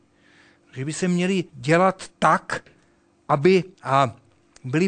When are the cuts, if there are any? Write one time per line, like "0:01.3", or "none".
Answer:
0:01.5
0:03.7